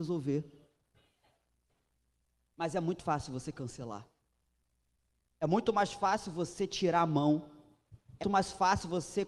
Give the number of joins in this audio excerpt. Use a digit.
2